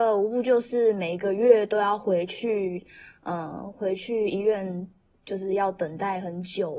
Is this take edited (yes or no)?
no